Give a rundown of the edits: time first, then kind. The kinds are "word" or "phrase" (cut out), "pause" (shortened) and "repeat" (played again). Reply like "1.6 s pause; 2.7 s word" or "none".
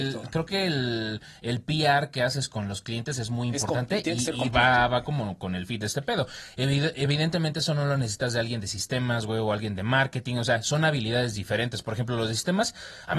none